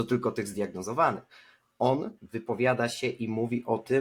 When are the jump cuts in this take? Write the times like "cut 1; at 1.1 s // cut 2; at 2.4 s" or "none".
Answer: cut 1; at 2.2 s